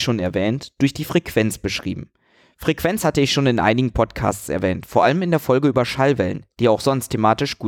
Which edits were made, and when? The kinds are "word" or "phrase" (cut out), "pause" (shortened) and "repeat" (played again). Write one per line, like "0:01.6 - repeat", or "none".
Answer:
none